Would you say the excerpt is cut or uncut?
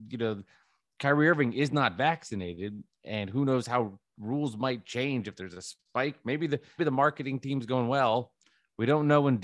cut